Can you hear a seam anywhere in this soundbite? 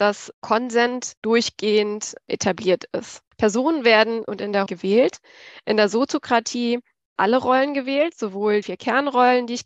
yes; 6 cuts; at 1.2 s, 3.3 s, 4.3 s, 4.7 s, 7.2 s, 8.6 s

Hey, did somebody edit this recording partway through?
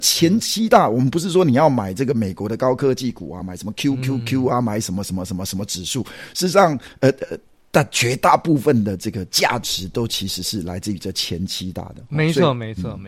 no; 0 cuts

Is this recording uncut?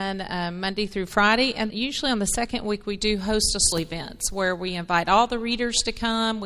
no; 2 cuts; at 1.7 s, 3.7 s

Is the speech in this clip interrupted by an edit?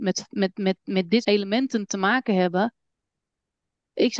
yes; 1 cut; at 1.2 s

